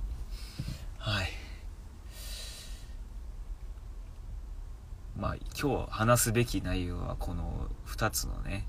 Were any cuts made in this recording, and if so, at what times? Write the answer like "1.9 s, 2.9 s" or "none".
none